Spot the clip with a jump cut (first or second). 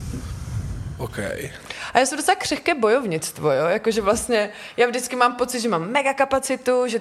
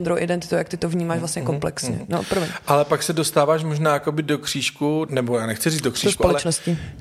second